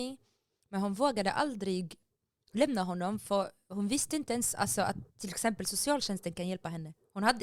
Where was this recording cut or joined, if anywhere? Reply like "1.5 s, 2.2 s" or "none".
none